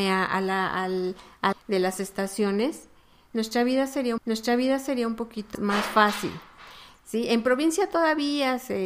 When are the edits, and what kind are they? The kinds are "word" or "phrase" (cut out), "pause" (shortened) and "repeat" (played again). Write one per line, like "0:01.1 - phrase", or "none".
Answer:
0:01.5 - phrase
0:04.2 - repeat
0:05.5 - word